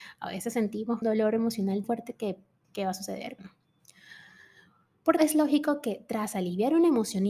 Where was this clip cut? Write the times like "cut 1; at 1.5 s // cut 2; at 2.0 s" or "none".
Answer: cut 1; at 1.0 s // cut 2; at 1.8 s // cut 3; at 2.6 s // cut 4; at 3.4 s // cut 5; at 5.2 s